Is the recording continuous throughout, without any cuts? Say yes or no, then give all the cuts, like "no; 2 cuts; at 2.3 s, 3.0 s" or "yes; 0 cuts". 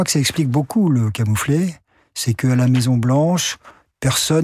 yes; 0 cuts